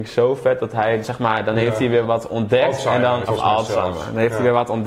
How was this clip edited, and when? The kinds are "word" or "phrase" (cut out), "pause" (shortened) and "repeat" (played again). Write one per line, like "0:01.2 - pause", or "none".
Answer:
0:01.0 - word
0:02.0 - word
0:03.2 - word